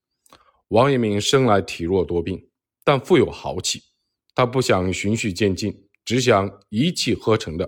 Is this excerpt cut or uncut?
uncut